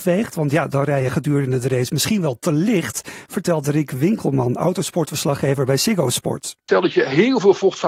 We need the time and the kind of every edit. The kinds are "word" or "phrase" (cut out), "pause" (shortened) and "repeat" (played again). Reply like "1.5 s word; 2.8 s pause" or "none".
none